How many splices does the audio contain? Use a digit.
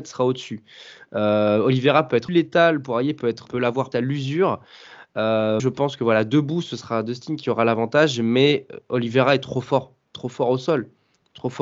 4